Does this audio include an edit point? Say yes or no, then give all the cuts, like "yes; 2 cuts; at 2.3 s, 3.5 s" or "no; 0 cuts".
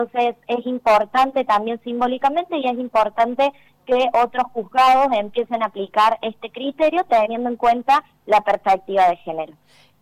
no; 0 cuts